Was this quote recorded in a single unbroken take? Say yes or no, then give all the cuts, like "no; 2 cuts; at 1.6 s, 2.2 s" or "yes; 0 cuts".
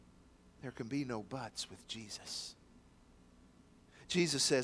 yes; 0 cuts